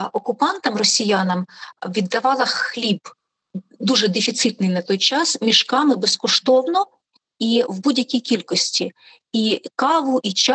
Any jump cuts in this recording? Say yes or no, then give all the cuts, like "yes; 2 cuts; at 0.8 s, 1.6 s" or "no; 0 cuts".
no; 0 cuts